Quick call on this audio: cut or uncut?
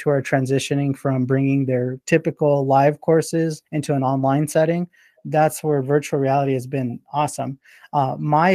cut